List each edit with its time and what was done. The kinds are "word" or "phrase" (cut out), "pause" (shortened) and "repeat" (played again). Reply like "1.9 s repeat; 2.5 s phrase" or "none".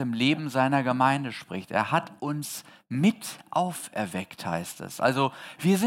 none